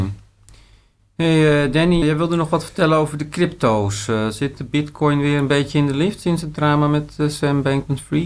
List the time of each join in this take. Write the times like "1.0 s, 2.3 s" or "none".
2.0 s